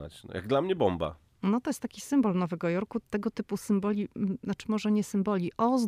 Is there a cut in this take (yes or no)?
no